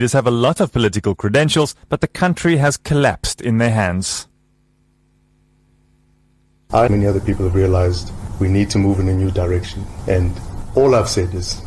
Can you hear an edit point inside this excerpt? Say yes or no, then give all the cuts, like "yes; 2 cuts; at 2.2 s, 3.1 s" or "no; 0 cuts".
yes; 2 cuts; at 1.8 s, 6.9 s